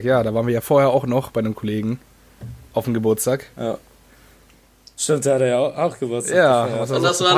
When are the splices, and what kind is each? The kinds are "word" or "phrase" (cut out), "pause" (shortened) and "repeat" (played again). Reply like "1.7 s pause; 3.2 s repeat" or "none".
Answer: none